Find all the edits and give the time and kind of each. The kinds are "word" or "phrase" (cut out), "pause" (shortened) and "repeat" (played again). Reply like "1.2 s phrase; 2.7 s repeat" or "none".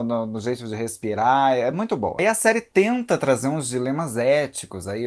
none

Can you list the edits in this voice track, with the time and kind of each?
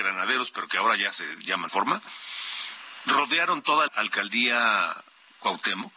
1.7 s phrase; 3.9 s word

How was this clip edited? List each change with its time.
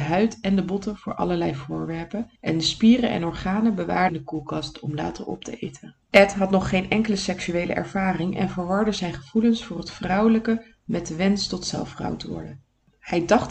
2.4 s pause; 4.1 s word; 6.0 s pause

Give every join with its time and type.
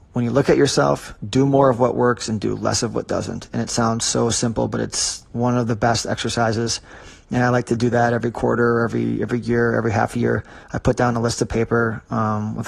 10.6 s pause

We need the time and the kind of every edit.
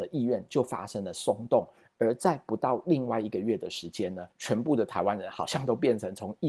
4.3 s pause

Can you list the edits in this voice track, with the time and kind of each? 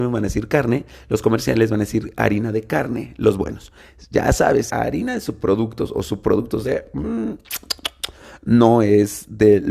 4.7 s word

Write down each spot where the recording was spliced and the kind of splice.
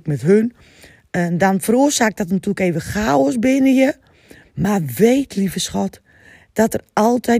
none

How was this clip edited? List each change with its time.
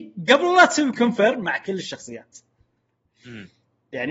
none

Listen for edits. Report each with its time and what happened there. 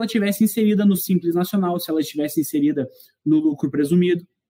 none

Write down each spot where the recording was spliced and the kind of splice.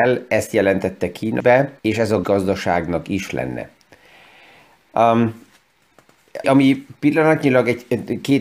1.4 s word; 1.8 s pause; 2.2 s word; 3.3 s word; 6.4 s word

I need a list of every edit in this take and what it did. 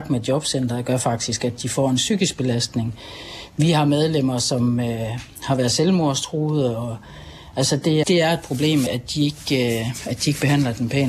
8.0 s word; 8.9 s word

